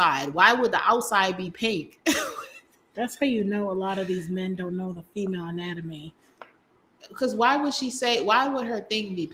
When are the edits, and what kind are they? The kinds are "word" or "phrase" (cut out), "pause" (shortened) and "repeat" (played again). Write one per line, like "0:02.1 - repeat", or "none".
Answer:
none

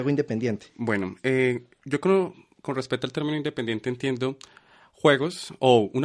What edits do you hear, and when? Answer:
none

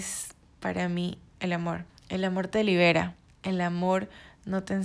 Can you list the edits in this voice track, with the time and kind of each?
0:01.9 - pause
0:03.3 - pause

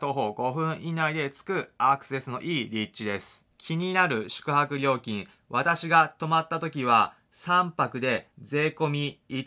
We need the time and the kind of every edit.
0:08.3 - pause

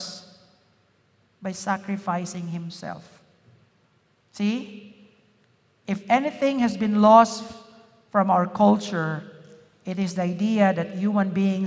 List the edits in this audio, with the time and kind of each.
none

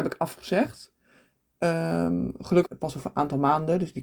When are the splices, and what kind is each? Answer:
0:02.7 - word

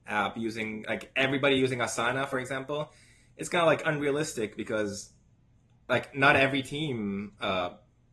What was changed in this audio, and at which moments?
none

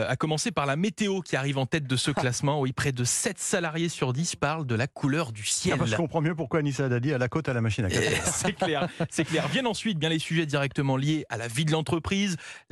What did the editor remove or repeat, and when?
none

